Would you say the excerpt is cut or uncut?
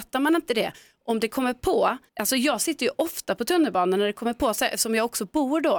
cut